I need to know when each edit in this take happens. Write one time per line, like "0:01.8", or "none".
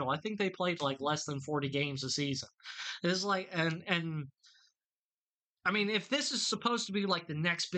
none